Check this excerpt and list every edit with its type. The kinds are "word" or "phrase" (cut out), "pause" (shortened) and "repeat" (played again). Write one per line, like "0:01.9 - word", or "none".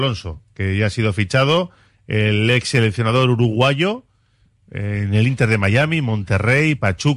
none